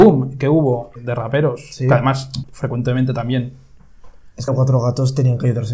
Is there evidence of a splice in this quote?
yes; 3 cuts; at 1.0 s, 2.4 s, 4.5 s

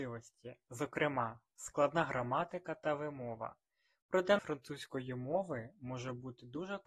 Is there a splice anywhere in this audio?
yes; 1 cut; at 4.4 s

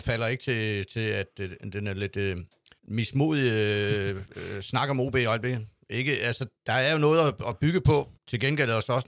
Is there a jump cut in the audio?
yes; 3 cuts; at 2.8 s, 6.6 s, 8.2 s

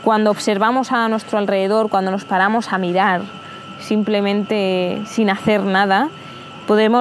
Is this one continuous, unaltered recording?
yes; 0 cuts

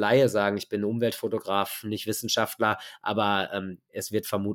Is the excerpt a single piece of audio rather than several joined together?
yes; 0 cuts

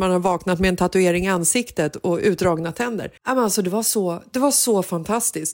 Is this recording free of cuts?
no; 1 cut; at 3.2 s

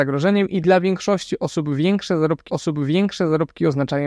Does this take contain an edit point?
yes; 1 cut; at 2.5 s

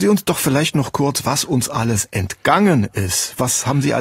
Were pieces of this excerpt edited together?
no; 0 cuts

